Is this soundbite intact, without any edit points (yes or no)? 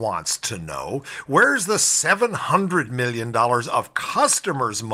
yes